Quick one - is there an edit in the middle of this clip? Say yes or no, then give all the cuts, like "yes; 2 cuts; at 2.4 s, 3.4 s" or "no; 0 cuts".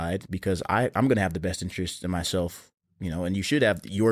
no; 0 cuts